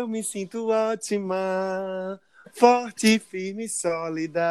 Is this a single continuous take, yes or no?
yes